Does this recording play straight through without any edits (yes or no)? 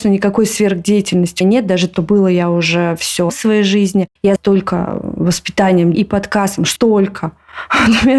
no